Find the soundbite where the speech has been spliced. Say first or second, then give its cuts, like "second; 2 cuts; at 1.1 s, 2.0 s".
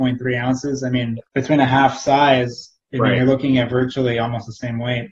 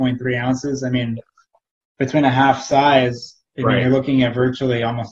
first; 1 cut; at 1.3 s